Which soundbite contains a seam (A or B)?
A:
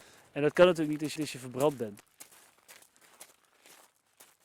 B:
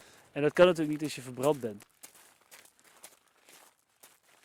A